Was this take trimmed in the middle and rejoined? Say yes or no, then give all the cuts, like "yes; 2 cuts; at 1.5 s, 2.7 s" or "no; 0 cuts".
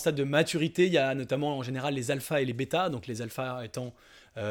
no; 0 cuts